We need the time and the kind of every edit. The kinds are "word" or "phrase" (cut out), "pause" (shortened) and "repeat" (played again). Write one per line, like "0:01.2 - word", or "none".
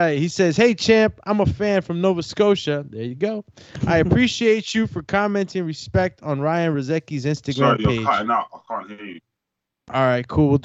none